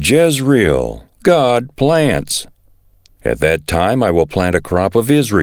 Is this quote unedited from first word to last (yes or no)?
yes